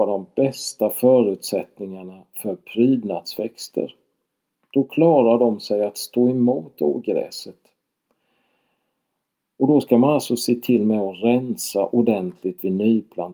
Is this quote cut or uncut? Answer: uncut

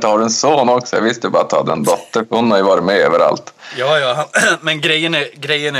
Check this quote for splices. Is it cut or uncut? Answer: uncut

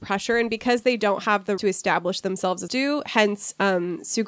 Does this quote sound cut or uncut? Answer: cut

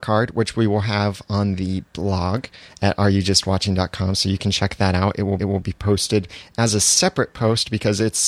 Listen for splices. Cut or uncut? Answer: cut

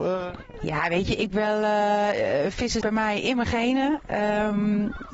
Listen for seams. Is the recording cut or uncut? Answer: cut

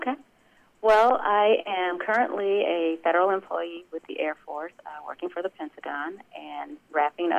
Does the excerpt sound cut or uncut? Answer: uncut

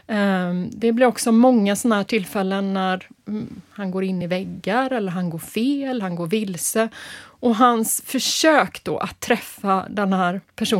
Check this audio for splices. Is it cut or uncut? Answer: uncut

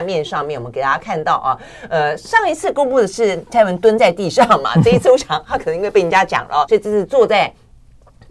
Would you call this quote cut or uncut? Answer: cut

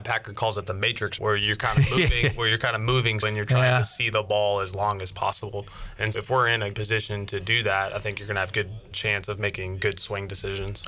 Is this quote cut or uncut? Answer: cut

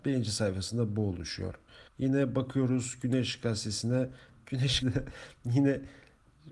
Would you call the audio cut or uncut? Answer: cut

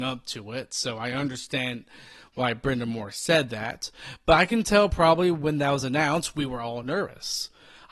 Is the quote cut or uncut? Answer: uncut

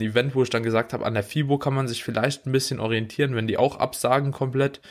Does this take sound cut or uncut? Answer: uncut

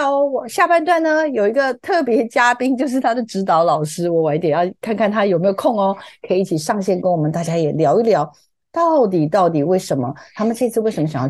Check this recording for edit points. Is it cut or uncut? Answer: uncut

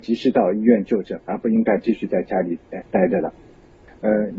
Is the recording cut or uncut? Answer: cut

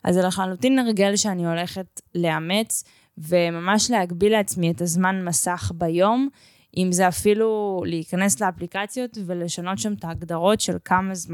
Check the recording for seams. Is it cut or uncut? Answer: cut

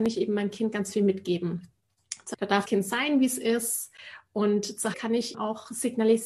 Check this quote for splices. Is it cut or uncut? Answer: cut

